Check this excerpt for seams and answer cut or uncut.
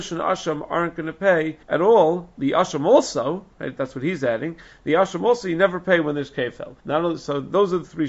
cut